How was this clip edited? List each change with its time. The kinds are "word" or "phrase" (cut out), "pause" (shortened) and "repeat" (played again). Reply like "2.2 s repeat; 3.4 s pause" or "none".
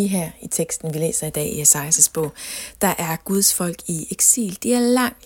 none